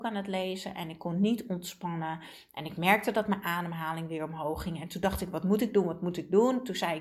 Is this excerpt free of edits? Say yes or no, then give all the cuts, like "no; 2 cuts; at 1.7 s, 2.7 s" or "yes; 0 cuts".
yes; 0 cuts